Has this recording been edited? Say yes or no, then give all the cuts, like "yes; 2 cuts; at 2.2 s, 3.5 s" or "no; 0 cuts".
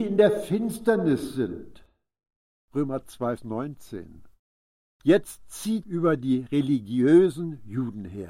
yes; 2 cuts; at 3.4 s, 5.8 s